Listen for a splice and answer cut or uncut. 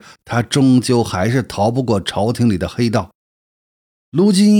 uncut